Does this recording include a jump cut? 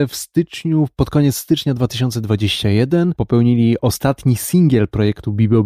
no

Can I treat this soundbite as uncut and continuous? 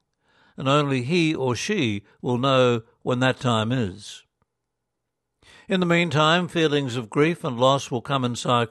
yes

